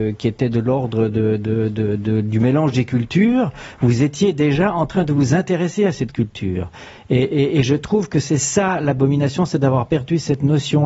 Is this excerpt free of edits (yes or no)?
yes